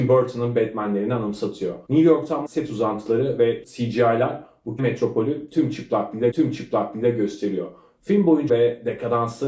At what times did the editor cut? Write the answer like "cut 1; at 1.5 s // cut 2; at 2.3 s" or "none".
cut 1; at 1.9 s // cut 2; at 2.4 s // cut 3; at 3.6 s // cut 4; at 4.8 s // cut 5; at 6.3 s // cut 6; at 8.5 s